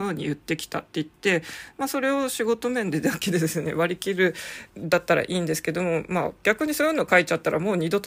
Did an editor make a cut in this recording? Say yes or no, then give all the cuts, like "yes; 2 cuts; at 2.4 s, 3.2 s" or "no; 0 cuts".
yes; 1 cut; at 4.7 s